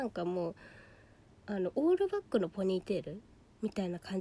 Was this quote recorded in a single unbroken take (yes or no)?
yes